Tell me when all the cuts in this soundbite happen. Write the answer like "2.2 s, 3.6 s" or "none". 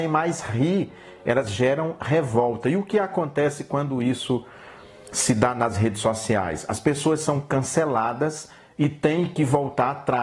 none